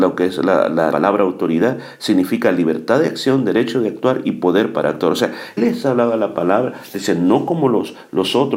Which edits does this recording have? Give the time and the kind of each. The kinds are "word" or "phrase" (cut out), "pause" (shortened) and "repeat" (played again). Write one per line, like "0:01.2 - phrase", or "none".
0:00.9 - word
0:05.6 - word